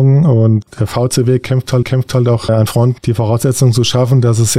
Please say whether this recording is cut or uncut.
cut